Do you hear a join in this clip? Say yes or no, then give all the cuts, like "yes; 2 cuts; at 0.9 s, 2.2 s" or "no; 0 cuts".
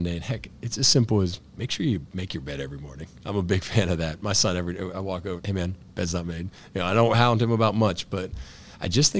yes; 1 cut; at 5.4 s